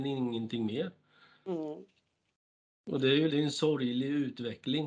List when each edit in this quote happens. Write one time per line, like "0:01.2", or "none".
0:03.3